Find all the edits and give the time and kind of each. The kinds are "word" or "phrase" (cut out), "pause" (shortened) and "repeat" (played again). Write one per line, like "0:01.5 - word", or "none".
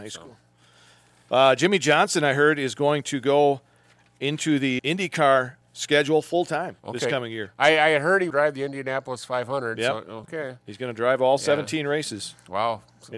0:04.8 - word
0:05.6 - pause
0:06.8 - pause
0:08.3 - phrase
0:10.2 - word